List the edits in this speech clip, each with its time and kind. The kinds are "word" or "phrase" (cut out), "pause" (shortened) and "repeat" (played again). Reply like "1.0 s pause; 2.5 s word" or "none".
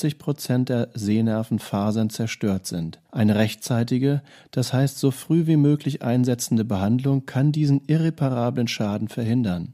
3.1 s pause